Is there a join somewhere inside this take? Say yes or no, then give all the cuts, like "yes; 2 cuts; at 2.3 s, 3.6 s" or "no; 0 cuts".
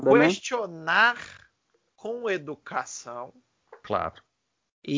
no; 0 cuts